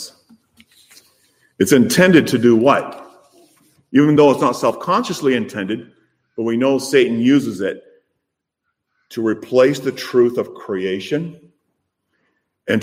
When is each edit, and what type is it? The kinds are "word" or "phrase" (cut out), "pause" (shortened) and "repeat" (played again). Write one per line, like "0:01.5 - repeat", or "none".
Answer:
none